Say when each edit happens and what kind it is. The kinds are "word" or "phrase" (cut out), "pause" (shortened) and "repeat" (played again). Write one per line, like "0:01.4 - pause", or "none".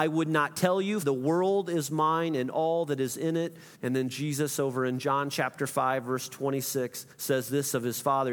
0:01.0 - word
0:03.7 - pause
0:07.1 - pause